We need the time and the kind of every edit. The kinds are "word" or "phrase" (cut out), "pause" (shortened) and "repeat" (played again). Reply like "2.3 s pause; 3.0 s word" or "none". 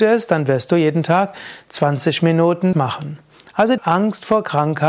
2.7 s word; 3.8 s word